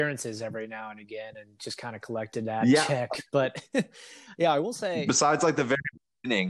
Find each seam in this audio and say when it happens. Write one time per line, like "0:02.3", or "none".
none